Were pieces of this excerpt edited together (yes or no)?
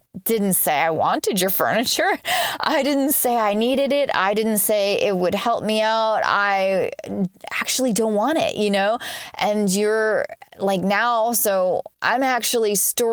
no